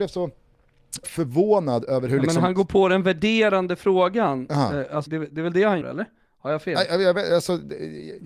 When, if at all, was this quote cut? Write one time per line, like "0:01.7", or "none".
0:01.0
0:05.1
0:05.8